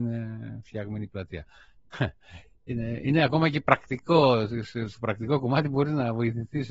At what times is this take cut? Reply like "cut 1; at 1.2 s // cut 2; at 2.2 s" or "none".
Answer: none